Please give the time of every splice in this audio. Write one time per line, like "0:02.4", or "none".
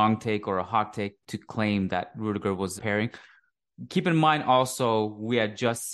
0:01.2
0:02.8